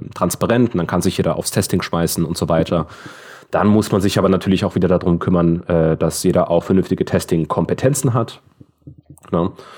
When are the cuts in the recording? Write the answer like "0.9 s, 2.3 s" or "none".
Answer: none